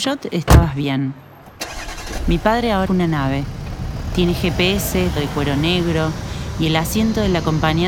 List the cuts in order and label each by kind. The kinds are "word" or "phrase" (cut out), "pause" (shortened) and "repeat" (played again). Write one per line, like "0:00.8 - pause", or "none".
0:02.9 - word
0:05.2 - word